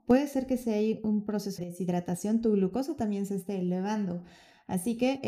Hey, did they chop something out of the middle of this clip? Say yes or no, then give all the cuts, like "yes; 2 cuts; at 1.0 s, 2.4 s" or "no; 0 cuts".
yes; 1 cut; at 1.6 s